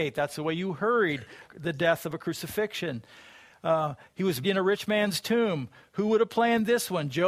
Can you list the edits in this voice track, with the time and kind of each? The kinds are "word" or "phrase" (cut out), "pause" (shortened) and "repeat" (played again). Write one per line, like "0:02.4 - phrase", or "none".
0:01.4 - word
0:04.4 - word